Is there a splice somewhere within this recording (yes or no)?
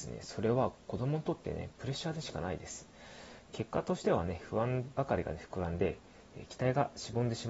no